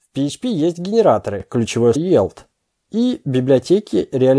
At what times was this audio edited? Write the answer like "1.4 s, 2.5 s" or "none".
2.0 s